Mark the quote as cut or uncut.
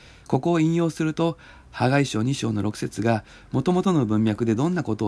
uncut